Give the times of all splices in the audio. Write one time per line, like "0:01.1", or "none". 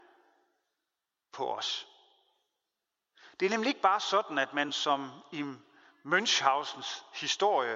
none